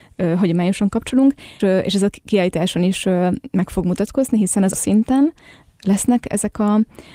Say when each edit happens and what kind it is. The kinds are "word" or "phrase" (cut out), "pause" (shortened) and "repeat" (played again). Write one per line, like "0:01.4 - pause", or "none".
0:01.6 - word
0:04.7 - word